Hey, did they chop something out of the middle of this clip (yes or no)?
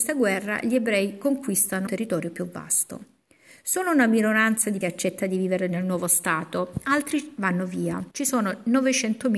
yes